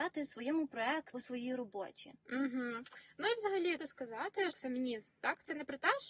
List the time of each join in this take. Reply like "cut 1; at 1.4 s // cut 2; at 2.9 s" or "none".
cut 1; at 1.1 s // cut 2; at 3.8 s // cut 3; at 4.5 s